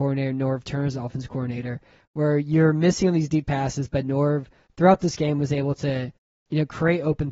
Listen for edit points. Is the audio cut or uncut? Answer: uncut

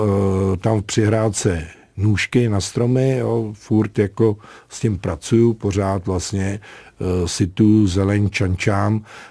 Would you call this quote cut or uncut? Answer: uncut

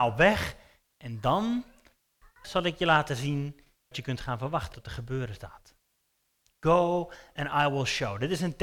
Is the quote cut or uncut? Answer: cut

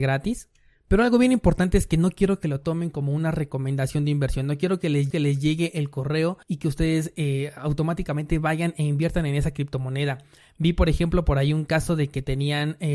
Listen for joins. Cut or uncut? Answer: cut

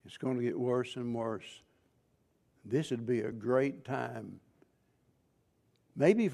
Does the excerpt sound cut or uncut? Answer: uncut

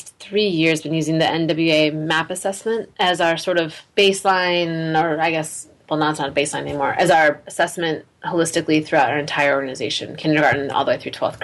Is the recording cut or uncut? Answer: uncut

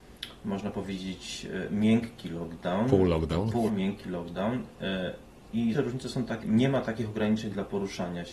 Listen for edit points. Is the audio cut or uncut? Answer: cut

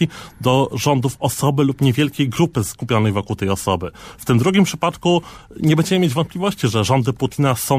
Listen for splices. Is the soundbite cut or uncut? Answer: uncut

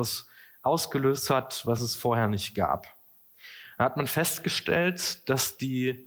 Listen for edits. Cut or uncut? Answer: uncut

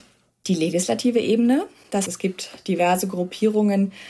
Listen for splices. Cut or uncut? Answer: cut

